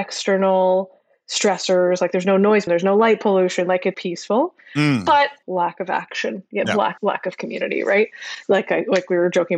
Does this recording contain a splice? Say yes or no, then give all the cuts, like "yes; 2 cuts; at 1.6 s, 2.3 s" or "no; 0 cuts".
yes; 5 cuts; at 2.7 s, 3.9 s, 5.4 s, 6.6 s, 7.0 s